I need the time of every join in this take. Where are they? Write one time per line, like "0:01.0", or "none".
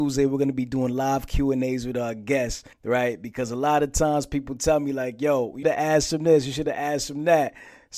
0:02.7
0:05.6